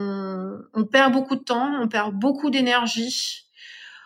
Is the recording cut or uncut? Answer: uncut